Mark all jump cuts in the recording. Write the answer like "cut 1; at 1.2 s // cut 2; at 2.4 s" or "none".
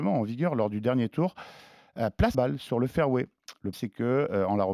cut 1; at 2.3 s // cut 2; at 3.7 s